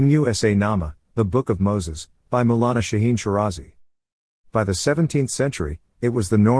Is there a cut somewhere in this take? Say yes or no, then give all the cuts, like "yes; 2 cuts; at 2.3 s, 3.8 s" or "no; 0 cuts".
no; 0 cuts